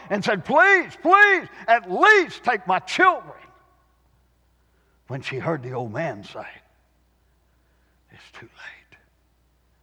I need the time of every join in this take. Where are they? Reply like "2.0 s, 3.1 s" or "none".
none